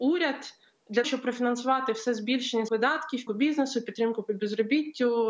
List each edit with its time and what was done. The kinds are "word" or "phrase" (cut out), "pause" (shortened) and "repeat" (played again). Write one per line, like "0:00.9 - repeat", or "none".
0:01.0 - word
0:02.7 - word
0:03.3 - word